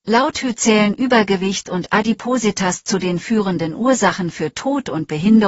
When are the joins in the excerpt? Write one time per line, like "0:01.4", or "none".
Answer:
none